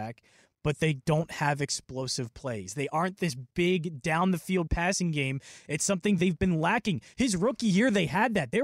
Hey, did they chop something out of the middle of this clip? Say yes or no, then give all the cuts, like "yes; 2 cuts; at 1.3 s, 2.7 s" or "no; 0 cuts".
no; 0 cuts